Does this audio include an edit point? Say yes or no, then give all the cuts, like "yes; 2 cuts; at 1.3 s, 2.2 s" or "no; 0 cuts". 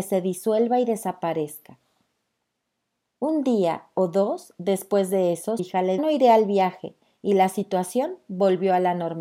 yes; 2 cuts; at 5.6 s, 6.0 s